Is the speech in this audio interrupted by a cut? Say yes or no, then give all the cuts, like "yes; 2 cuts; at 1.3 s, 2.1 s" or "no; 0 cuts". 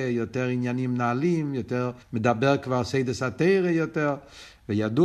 yes; 1 cut; at 2.0 s